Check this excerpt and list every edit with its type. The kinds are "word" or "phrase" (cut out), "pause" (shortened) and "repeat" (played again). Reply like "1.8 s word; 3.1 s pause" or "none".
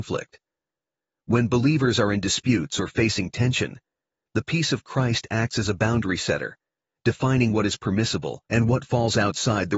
8.5 s pause